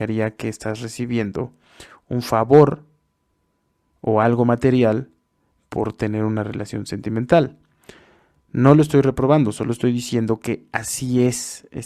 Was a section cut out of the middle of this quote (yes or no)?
no